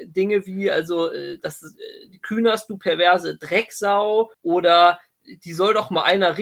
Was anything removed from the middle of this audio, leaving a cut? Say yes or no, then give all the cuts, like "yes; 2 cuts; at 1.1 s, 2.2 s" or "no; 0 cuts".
no; 0 cuts